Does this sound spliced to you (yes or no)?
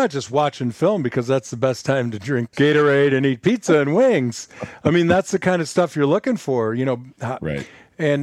yes